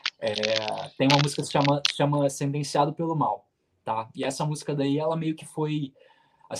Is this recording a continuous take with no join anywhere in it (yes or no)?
yes